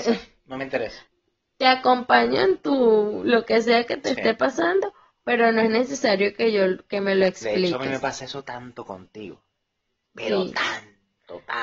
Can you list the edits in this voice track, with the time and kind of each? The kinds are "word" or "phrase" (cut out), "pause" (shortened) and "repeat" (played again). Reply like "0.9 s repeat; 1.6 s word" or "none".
none